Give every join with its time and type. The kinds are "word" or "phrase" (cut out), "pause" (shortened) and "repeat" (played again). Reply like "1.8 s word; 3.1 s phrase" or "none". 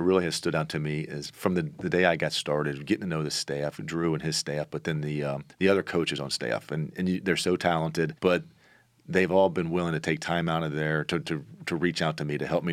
5.5 s pause; 8.2 s pause